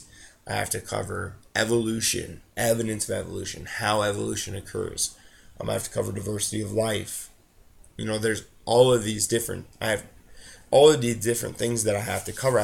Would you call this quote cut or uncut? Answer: uncut